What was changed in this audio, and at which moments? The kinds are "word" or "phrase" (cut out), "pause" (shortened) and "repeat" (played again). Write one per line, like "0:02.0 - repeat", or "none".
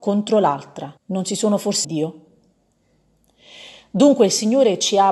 0:01.0 - pause
0:01.8 - phrase